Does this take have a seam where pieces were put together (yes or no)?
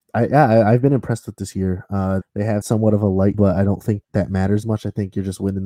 yes